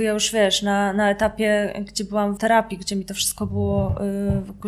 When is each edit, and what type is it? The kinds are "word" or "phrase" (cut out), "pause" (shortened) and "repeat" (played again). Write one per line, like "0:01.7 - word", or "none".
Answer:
0:02.4 - word